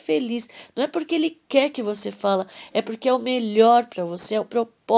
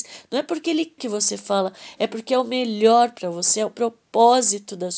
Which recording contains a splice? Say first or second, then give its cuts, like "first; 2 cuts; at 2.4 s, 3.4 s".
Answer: second; 1 cut; at 1.0 s